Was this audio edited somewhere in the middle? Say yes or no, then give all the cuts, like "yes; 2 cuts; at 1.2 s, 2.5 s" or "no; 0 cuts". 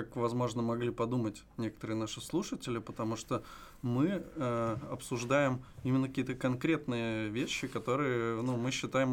no; 0 cuts